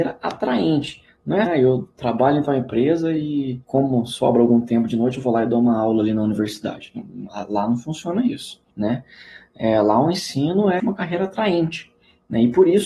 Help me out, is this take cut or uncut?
cut